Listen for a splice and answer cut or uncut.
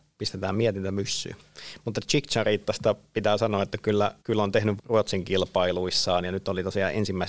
cut